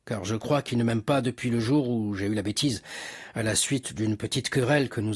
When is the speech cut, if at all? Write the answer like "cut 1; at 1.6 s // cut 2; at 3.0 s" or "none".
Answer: none